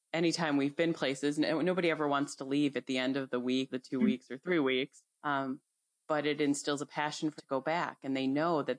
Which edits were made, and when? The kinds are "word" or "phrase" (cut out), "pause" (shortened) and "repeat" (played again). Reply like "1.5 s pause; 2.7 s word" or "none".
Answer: 3.7 s phrase; 5.1 s pause; 7.4 s word